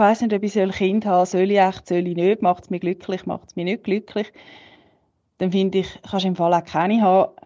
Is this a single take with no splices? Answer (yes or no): yes